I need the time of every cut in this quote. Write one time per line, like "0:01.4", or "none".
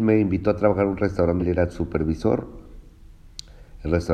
0:01.4